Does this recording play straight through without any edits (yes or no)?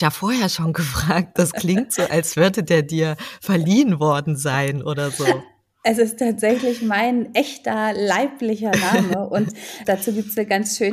no